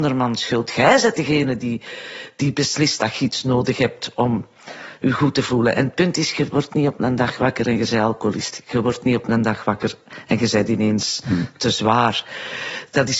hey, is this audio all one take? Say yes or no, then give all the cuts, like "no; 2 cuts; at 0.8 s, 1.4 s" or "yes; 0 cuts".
yes; 0 cuts